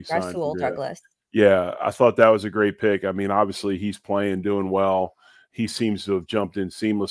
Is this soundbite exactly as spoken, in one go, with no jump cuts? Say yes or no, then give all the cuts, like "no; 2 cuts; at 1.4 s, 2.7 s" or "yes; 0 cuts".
yes; 0 cuts